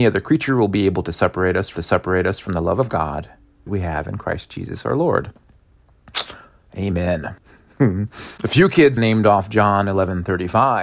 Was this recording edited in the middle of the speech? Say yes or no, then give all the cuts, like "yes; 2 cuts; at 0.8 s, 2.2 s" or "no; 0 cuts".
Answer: yes; 5 cuts; at 1.8 s, 3.7 s, 7.4 s, 8.4 s, 9.0 s